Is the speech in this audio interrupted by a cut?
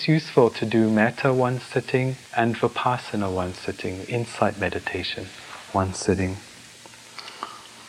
yes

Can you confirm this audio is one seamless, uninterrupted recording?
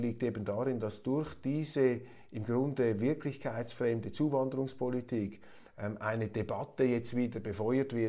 yes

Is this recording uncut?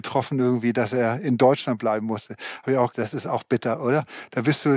no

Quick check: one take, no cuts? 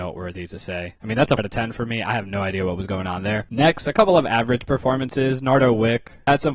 no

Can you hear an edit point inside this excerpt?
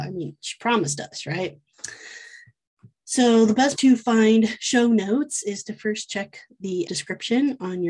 yes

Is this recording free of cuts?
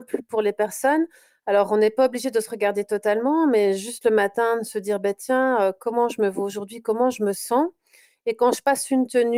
yes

